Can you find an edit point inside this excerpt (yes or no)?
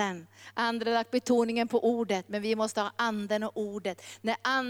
no